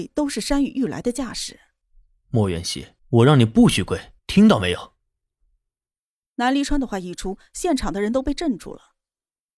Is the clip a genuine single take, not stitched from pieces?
no; 3 cuts; at 1.8 s, 3.0 s, 4.2 s

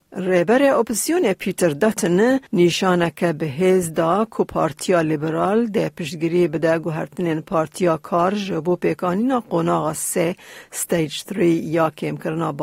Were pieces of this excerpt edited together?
yes; 1 cut; at 2.5 s

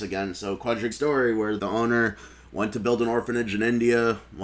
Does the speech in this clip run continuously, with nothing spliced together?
no; 2 cuts; at 0.9 s, 1.6 s

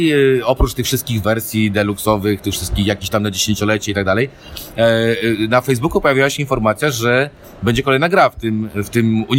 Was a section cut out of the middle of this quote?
no; 0 cuts

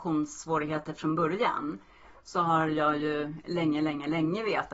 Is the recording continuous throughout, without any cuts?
yes; 0 cuts

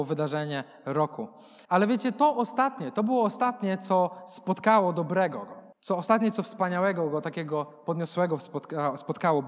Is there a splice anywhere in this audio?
yes; 2 cuts; at 1.6 s, 5.7 s

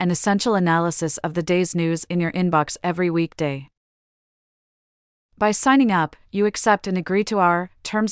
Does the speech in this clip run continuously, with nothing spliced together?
yes; 0 cuts

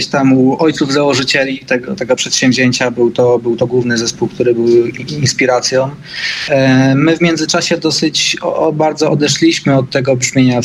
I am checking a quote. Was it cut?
no; 0 cuts

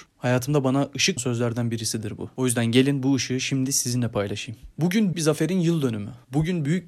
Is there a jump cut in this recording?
yes; 2 cuts; at 1.2 s, 5.1 s

